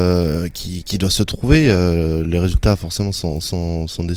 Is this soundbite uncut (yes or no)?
yes